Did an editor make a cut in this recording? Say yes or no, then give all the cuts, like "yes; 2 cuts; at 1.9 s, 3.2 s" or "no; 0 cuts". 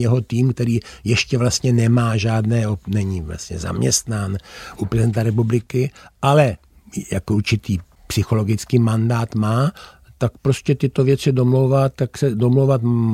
no; 0 cuts